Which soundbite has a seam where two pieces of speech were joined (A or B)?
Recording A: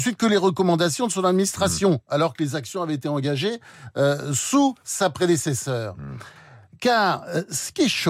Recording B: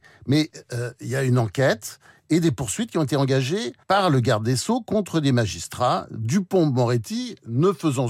B